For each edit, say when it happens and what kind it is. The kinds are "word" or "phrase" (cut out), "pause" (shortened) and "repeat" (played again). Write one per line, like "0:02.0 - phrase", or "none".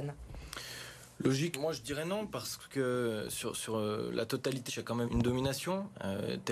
0:01.5 - word
0:04.7 - phrase
0:05.1 - word